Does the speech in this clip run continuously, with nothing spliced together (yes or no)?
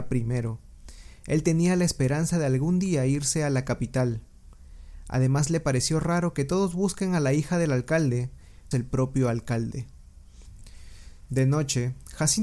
no